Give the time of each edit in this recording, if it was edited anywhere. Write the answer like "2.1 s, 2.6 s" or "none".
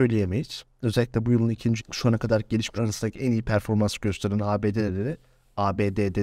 1.8 s, 2.7 s